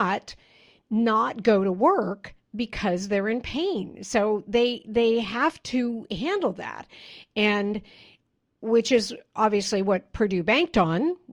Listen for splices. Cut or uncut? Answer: uncut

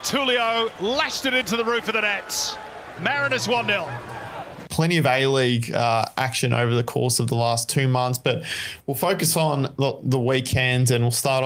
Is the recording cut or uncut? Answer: uncut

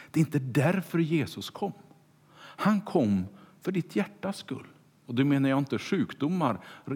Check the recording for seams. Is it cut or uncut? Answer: uncut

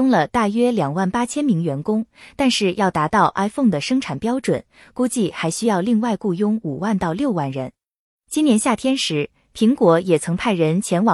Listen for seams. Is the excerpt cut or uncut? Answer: uncut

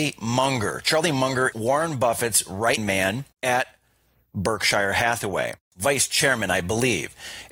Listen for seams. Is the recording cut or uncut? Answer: cut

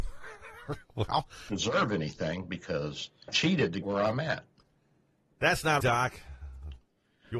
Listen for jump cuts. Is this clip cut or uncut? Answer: cut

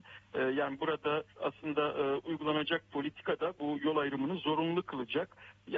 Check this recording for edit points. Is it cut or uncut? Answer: cut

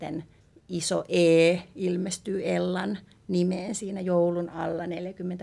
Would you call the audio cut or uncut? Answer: uncut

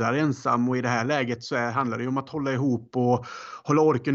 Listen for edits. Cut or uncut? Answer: uncut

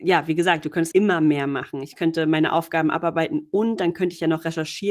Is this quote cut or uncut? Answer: cut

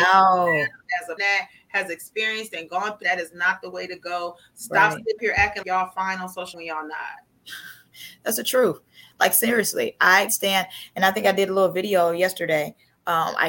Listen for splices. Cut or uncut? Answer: cut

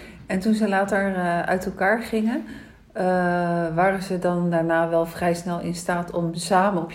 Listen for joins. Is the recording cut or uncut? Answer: uncut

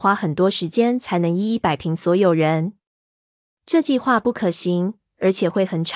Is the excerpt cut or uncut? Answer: uncut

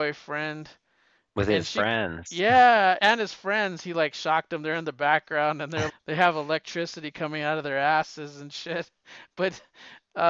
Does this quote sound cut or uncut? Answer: cut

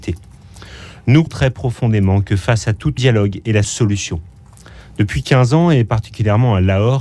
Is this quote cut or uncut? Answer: cut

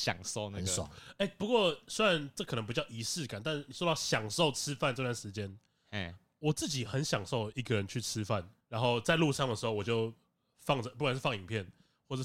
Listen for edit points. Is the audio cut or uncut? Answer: uncut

